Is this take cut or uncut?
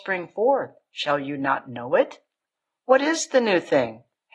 uncut